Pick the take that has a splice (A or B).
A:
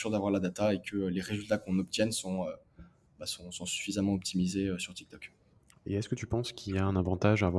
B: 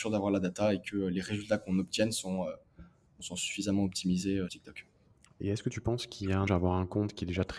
B